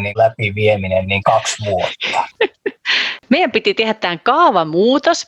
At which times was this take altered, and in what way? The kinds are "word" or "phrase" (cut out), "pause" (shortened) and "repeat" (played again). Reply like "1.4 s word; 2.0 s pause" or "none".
1.2 s word